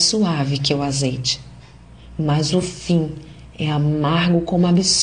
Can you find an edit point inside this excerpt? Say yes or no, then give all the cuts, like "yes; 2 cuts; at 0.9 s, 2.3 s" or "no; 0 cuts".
no; 0 cuts